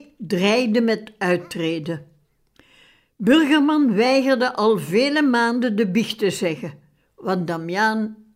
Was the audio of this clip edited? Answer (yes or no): no